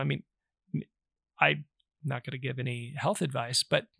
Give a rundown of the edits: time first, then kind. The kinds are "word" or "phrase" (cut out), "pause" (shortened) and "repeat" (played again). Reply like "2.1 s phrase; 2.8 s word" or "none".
none